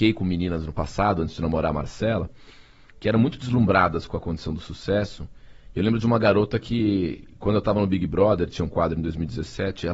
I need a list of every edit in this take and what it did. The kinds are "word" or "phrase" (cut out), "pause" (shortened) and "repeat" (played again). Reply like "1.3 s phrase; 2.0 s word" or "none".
none